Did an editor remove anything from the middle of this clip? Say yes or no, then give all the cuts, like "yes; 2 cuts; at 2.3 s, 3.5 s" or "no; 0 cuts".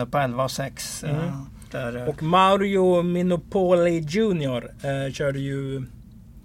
no; 0 cuts